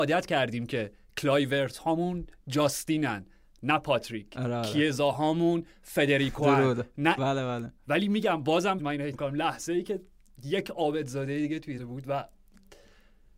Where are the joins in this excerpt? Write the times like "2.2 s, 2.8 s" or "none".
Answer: 7.2 s, 8.8 s, 9.1 s, 11.8 s